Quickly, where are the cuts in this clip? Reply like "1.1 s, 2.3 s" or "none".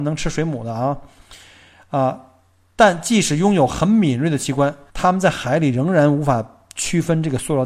4.9 s